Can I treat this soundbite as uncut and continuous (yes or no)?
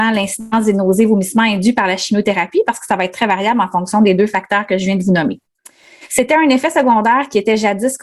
yes